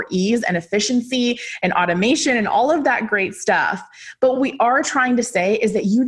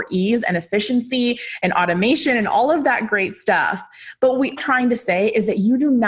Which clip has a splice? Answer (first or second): second